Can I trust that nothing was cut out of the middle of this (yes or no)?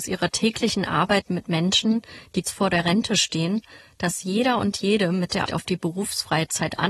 no